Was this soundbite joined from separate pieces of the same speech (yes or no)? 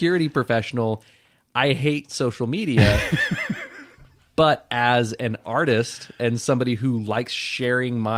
no